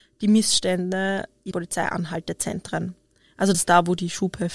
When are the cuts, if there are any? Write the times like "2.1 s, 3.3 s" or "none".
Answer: 1.5 s, 3.5 s